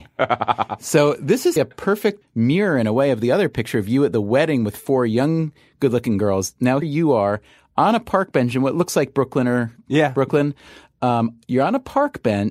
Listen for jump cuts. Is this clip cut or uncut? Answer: cut